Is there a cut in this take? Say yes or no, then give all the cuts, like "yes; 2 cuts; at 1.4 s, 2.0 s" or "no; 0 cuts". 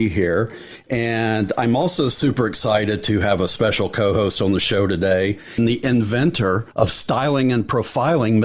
yes; 1 cut; at 6.7 s